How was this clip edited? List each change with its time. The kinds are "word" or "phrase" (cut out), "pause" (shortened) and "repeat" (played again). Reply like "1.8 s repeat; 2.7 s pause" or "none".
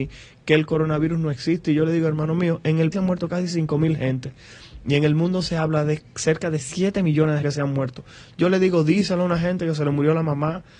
2.9 s word; 7.4 s word